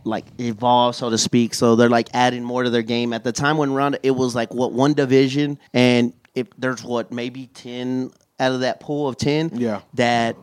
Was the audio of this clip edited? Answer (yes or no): yes